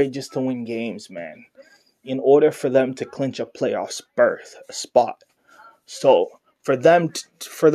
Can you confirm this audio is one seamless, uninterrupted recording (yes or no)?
yes